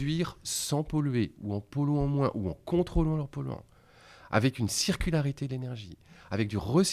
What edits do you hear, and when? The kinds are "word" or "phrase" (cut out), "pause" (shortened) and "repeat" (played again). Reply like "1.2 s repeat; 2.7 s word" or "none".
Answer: none